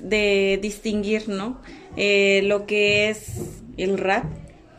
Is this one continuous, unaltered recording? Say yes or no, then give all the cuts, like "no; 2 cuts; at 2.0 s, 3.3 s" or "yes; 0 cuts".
yes; 0 cuts